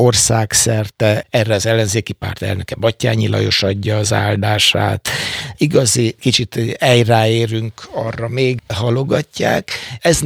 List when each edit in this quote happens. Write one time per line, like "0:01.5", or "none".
0:08.6